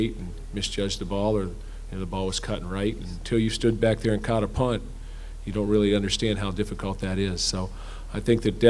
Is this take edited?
no; 0 cuts

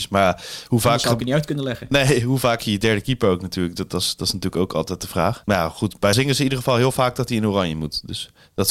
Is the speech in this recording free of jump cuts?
no; 2 cuts; at 2.6 s, 6.1 s

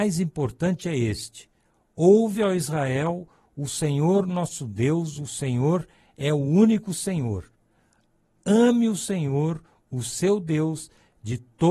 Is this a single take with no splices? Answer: yes; 0 cuts

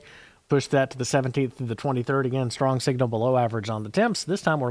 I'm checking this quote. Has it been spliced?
no; 0 cuts

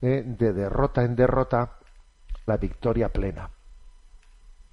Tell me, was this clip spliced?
yes; 1 cut; at 2.5 s

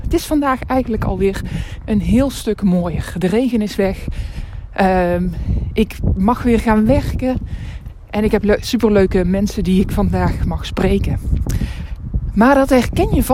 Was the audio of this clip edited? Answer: no; 0 cuts

